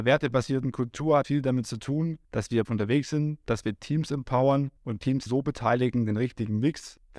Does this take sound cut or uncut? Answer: cut